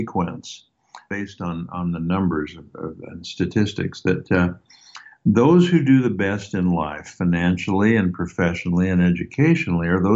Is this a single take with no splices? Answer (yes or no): yes